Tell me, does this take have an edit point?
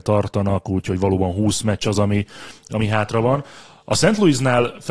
no; 0 cuts

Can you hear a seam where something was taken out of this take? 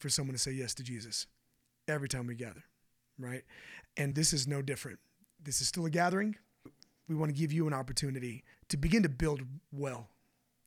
yes; 3 cuts; at 4.1 s, 6.7 s, 8.5 s

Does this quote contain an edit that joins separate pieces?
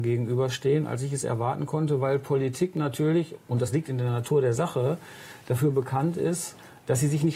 no; 0 cuts

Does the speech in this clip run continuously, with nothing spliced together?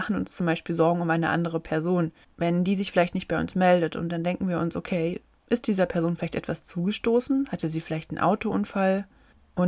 no; 1 cut; at 2.2 s

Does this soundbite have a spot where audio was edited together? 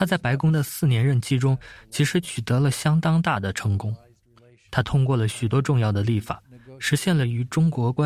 no; 0 cuts

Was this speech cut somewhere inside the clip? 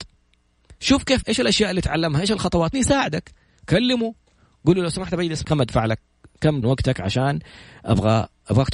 yes; 4 cuts; at 1.2 s, 2.7 s, 5.4 s, 6.6 s

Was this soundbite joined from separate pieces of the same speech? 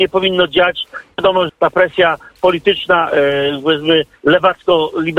yes; 1 cut; at 1.5 s

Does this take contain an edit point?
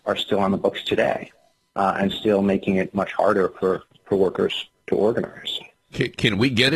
no; 0 cuts

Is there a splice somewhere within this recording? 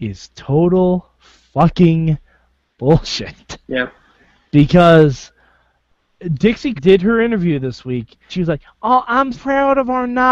yes; 3 cuts; at 6.8 s, 8.3 s, 9.3 s

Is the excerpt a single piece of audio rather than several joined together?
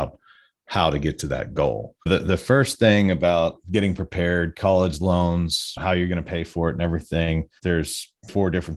no; 2 cuts; at 2.0 s, 7.6 s

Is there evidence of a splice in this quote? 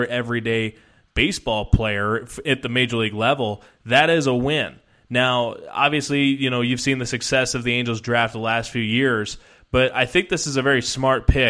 no; 0 cuts

